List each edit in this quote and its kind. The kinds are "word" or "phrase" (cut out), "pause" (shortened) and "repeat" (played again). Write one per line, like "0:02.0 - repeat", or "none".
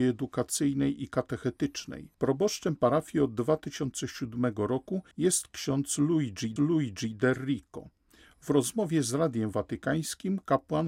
0:02.1 - pause
0:05.1 - pause
0:06.6 - repeat